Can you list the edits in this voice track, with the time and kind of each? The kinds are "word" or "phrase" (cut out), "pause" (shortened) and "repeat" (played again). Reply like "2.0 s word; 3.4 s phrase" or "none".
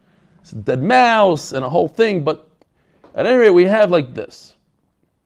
none